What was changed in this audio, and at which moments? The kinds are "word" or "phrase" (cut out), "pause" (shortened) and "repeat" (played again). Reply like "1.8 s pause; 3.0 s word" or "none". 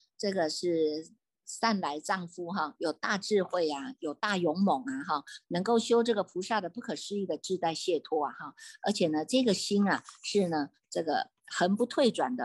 none